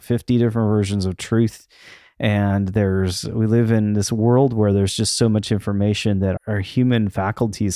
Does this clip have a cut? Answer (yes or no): yes